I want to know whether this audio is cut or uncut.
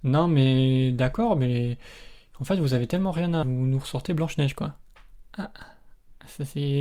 cut